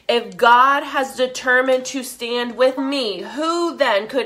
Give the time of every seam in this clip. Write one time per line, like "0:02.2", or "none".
0:02.8